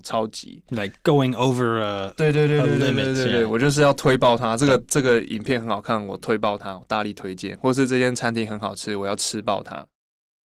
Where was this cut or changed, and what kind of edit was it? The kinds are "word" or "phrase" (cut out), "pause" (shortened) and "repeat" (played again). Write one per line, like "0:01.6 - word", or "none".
0:01.0 - pause